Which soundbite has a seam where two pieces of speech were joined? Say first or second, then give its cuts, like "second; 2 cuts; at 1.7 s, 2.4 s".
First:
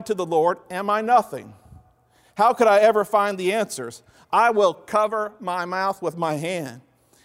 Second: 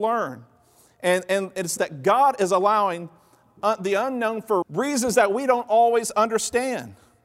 second; 2 cuts; at 1.8 s, 4.6 s